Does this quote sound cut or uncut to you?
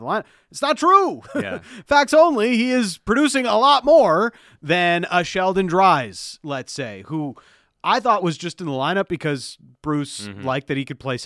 uncut